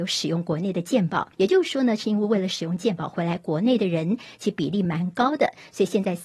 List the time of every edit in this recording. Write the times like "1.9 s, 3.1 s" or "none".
1.3 s